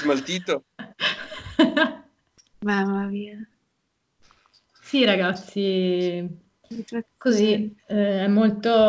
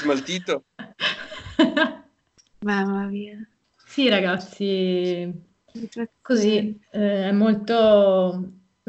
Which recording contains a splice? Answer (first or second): second